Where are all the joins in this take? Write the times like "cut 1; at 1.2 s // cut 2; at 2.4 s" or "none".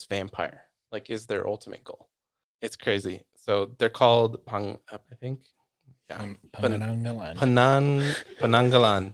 cut 1; at 5.1 s